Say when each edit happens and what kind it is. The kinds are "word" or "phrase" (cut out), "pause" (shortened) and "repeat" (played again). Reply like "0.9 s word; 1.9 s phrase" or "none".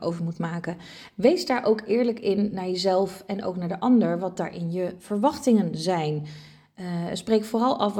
none